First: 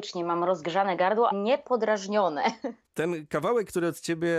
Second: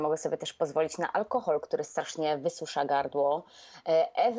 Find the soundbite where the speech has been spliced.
first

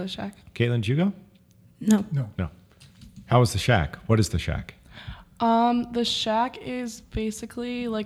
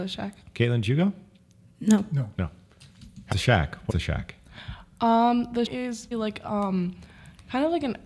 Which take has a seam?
second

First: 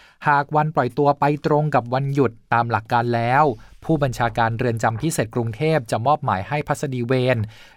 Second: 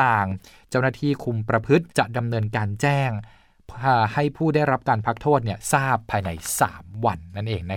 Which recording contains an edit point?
second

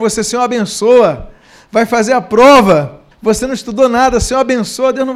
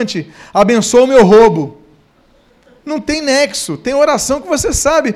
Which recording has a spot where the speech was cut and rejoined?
first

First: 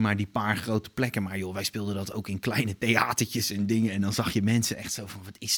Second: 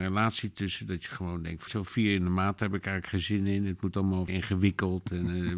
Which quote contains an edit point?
second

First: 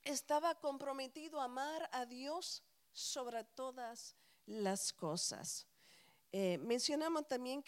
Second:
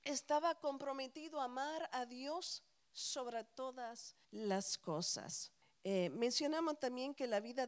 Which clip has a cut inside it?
second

